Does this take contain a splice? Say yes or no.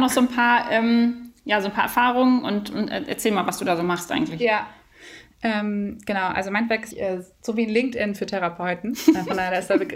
yes